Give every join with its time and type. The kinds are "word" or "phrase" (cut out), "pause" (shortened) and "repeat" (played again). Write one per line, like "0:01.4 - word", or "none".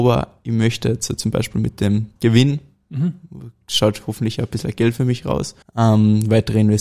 0:02.2 - pause
0:05.6 - pause

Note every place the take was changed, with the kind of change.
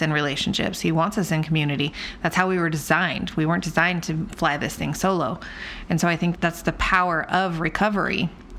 0:06.4 - word

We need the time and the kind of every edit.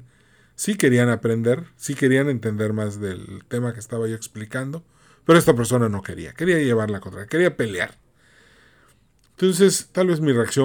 none

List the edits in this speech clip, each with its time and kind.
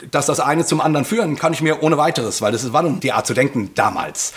0:01.4 - word
0:03.0 - word

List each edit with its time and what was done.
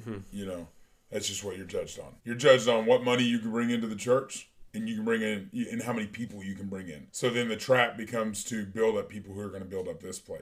0:02.2 - pause
0:07.1 - pause

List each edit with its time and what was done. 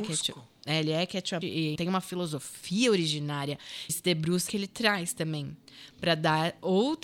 0:01.4 - word
0:01.8 - word
0:03.9 - phrase
0:04.5 - phrase

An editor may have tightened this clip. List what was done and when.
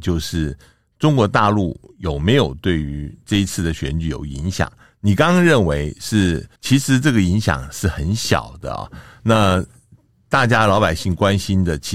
0:06.6 - pause

